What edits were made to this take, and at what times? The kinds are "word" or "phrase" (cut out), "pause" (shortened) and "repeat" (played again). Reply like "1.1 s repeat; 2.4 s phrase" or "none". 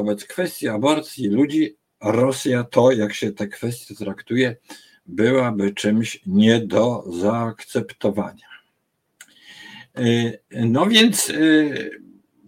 none

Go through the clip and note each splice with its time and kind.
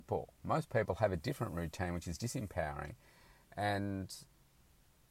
none

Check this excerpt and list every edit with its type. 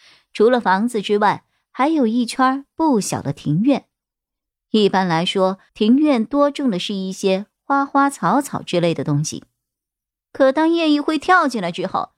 5.7 s pause

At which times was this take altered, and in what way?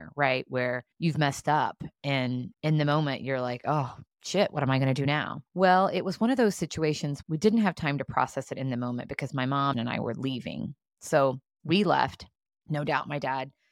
0.9 s pause; 2.5 s pause; 4.1 s pause; 5.5 s pause; 7.2 s word; 9.7 s phrase

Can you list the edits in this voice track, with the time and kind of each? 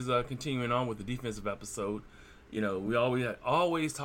none

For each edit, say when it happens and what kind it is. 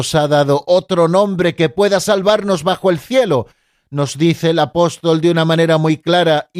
none

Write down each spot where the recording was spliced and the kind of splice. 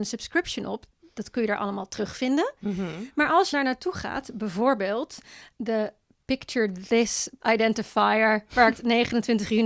3.5 s word; 7.4 s word; 8.8 s word

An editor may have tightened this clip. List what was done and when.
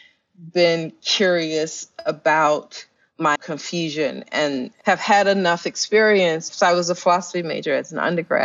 3.4 s word; 6.5 s word

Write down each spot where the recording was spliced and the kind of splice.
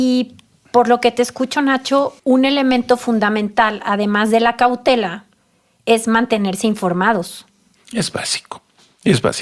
2.2 s pause

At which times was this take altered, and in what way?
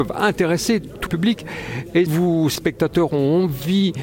1.1 s word; 2.1 s word; 2.6 s word

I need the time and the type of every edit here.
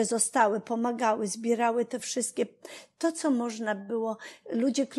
none

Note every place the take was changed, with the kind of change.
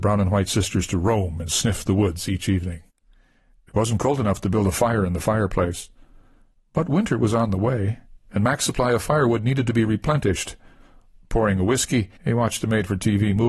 12.2 s pause

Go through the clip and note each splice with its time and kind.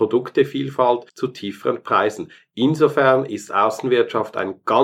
1.1 s pause

